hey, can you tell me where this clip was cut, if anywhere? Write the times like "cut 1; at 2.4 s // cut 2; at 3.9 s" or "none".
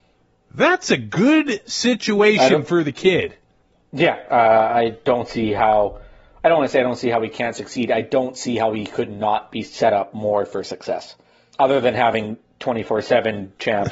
none